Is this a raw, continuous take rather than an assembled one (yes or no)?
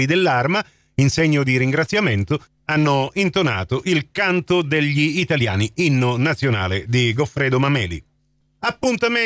yes